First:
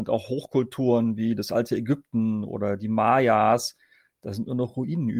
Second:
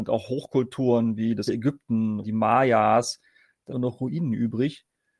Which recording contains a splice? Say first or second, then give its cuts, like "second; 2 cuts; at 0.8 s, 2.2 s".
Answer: second; 3 cuts; at 1.5 s, 2.2 s, 3.7 s